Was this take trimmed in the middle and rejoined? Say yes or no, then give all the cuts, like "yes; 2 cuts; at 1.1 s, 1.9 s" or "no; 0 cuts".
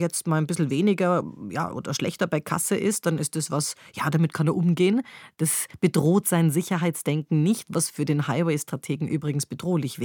no; 0 cuts